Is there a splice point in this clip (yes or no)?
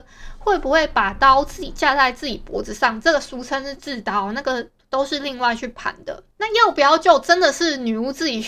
yes